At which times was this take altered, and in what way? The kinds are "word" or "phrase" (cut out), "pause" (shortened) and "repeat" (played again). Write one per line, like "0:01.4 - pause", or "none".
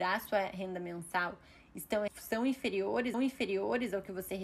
0:02.1 - word
0:03.1 - repeat